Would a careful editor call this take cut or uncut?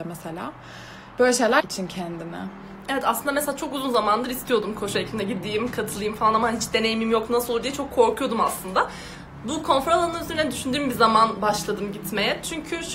cut